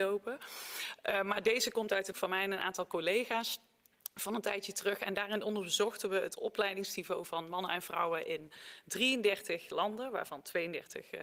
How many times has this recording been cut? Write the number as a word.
one